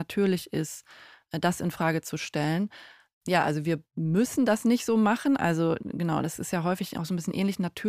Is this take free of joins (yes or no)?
yes